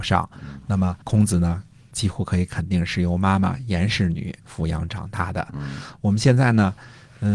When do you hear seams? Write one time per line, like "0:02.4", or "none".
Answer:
0:01.0
0:01.9
0:04.4